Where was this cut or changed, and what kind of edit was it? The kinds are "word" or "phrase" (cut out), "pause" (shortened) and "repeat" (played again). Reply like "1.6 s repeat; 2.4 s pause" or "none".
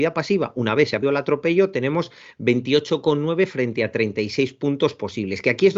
1.0 s word